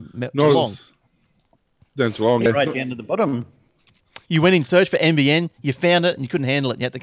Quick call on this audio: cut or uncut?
cut